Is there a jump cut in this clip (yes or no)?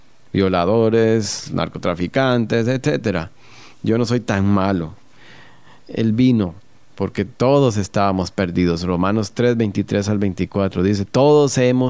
no